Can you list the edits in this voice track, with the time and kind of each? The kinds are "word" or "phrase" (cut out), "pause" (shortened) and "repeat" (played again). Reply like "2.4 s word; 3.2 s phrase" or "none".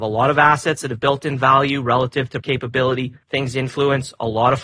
2.4 s word; 3.2 s pause